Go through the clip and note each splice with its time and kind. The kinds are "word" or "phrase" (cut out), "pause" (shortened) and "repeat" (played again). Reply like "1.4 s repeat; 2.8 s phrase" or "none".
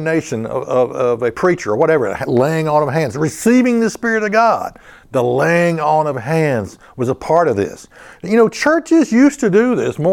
none